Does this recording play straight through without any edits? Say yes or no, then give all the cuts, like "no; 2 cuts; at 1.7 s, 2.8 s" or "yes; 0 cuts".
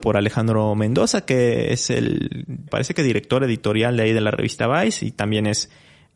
no; 1 cut; at 2.7 s